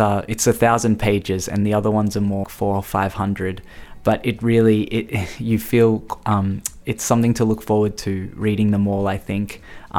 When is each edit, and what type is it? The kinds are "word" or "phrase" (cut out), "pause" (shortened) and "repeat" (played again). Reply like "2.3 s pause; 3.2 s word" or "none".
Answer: 2.4 s word